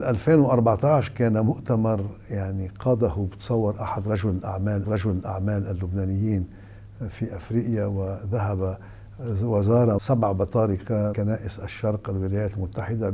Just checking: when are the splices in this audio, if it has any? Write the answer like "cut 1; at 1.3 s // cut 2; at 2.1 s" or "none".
cut 1; at 4.8 s // cut 2; at 10.0 s // cut 3; at 11.1 s

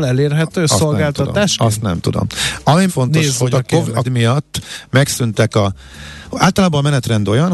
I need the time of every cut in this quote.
cut 1; at 2.9 s // cut 2; at 3.5 s // cut 3; at 4.0 s

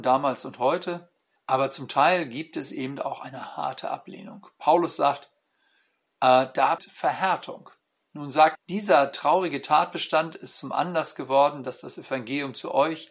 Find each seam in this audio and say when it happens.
cut 1; at 1.4 s // cut 2; at 6.8 s // cut 3; at 8.5 s

